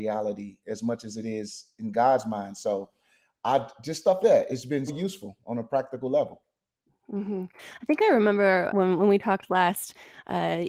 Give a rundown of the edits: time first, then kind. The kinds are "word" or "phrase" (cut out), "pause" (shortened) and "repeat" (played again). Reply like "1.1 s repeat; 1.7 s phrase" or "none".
4.2 s word; 4.9 s word; 8.7 s word